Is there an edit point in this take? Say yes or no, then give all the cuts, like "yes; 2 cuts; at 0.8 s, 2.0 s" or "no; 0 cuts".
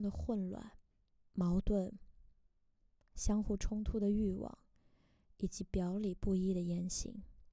yes; 1 cut; at 0.9 s